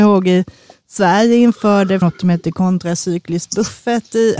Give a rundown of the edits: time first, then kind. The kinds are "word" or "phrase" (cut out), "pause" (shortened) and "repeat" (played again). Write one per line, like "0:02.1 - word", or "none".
0:02.0 - word